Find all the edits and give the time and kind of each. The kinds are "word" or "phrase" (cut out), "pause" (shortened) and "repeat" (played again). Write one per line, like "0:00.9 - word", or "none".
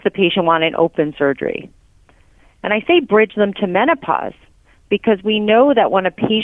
none